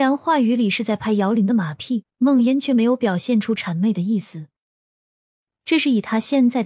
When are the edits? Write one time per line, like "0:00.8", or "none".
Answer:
0:02.1